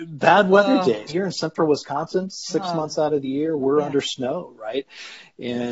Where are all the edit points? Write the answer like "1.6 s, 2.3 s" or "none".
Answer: 1.1 s